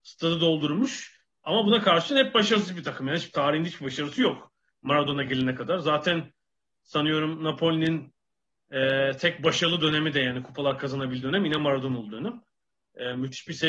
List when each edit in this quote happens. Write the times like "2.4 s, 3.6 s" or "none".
none